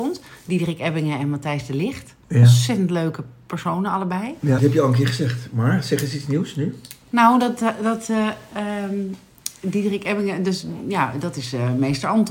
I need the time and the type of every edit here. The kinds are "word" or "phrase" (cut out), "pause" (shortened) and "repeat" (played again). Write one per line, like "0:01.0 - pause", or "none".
0:02.2 - pause
0:04.6 - word